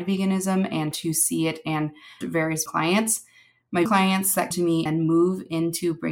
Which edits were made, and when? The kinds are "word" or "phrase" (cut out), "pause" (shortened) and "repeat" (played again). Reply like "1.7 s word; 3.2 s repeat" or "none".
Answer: 0.9 s word; 2.2 s word; 2.7 s word; 3.9 s word; 4.5 s word; 4.9 s word